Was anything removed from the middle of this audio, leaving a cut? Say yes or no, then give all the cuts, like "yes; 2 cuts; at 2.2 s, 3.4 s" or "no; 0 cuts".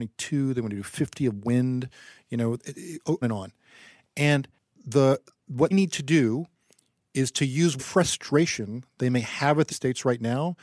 yes; 4 cuts; at 3.2 s, 5.7 s, 7.8 s, 9.7 s